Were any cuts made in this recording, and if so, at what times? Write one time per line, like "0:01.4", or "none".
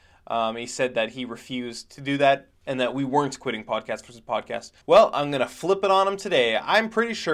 0:02.5
0:04.8

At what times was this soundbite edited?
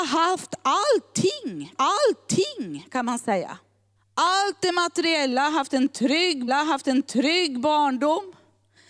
0:01.7
0:04.0
0:06.5

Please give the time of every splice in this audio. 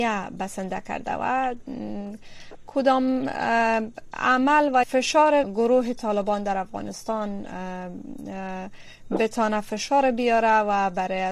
0:04.8
0:05.4

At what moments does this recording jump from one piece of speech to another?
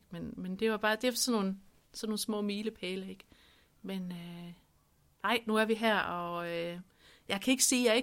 none

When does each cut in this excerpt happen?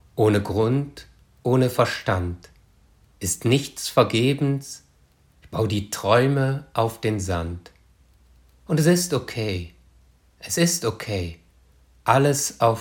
none

